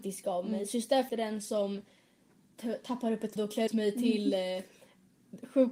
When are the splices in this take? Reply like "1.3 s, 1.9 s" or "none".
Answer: 1.1 s, 3.4 s, 3.7 s